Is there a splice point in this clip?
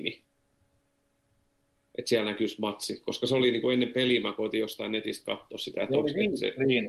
no; 0 cuts

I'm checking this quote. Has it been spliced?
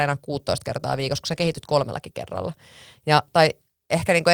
no; 0 cuts

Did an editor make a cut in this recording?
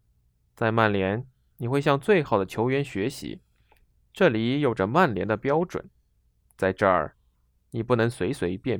no; 0 cuts

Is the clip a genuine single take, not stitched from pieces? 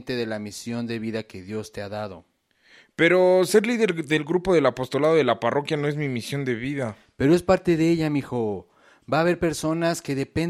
yes; 0 cuts

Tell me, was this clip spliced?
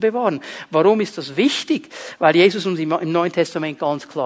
no; 0 cuts

